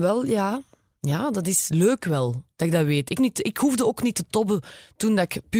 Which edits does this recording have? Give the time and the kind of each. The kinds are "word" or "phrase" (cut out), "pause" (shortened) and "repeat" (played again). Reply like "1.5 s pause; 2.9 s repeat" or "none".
2.5 s pause; 3.2 s word